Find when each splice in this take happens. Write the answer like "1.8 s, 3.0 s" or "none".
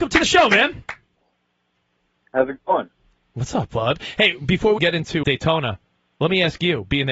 4.8 s, 5.2 s